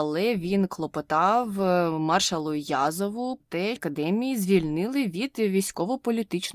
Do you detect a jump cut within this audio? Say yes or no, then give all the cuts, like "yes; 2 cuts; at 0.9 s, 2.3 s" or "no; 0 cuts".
yes; 2 cuts; at 3.4 s, 3.8 s